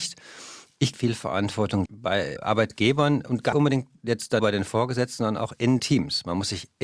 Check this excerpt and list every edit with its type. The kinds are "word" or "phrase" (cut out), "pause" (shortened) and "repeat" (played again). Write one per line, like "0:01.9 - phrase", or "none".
0:00.9 - word
0:01.9 - word
0:02.4 - word
0:03.5 - word
0:04.4 - word
0:05.8 - word